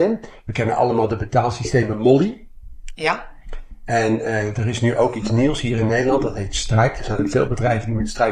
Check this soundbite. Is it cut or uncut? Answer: uncut